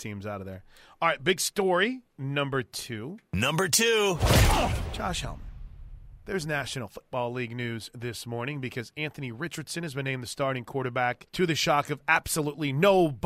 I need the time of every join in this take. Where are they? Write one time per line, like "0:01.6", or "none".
0:02.1
0:11.3

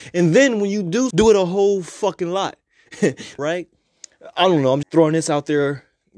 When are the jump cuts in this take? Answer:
0:01.1
0:03.4
0:04.8

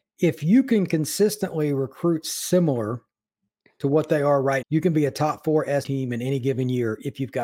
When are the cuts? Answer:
0:04.6
0:05.8

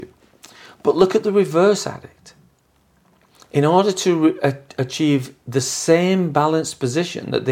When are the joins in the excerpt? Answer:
none

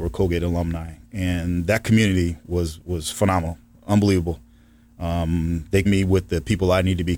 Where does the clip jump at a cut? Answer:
0:05.8

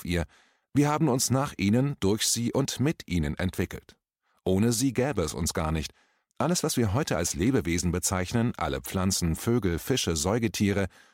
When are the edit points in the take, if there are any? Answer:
none

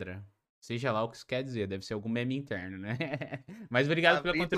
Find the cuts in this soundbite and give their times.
none

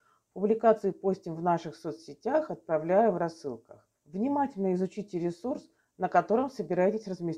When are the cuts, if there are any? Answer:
0:04.0

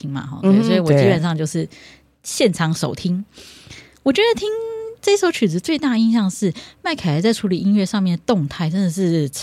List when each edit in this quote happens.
none

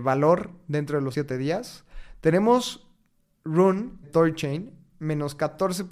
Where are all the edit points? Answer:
0:01.1
0:04.0

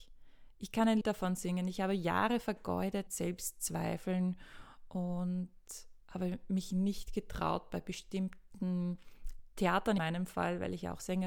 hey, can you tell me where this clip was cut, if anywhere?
0:01.0
0:03.1
0:10.0

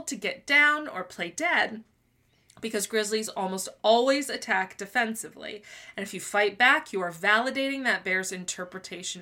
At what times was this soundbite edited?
none

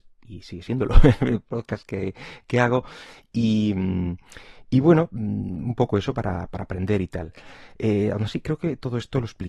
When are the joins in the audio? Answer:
none

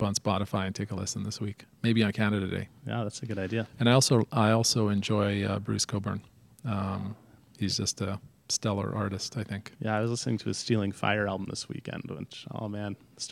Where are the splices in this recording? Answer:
none

